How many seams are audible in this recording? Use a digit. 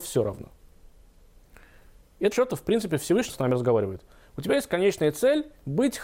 2